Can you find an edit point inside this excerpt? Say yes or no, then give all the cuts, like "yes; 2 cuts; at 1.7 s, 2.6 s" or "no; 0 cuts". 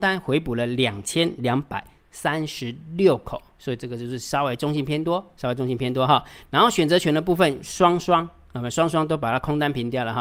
no; 0 cuts